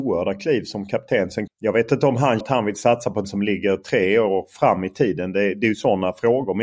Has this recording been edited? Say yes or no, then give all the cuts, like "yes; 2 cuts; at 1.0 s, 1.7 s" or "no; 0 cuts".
yes; 3 cuts; at 1.5 s, 2.4 s, 3.2 s